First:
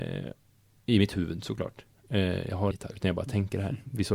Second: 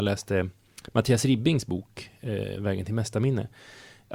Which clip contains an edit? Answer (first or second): first